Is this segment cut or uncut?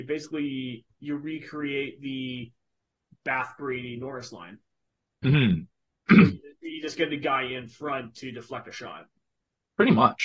uncut